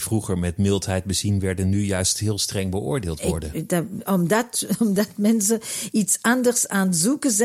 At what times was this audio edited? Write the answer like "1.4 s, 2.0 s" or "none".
none